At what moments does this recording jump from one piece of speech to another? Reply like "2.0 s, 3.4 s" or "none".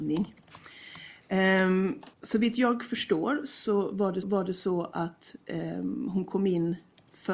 2.1 s, 4.2 s